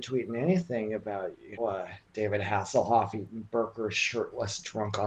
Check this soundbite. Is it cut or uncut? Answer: cut